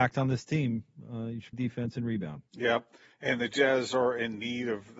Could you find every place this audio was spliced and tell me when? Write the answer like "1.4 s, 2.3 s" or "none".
1.5 s, 2.5 s